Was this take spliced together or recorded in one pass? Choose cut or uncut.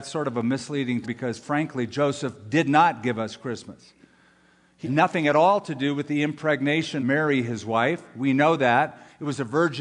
cut